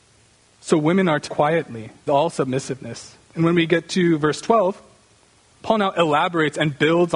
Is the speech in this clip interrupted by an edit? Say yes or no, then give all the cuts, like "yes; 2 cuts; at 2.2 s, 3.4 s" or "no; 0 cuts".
yes; 4 cuts; at 1.3 s, 2.1 s, 3.2 s, 5.5 s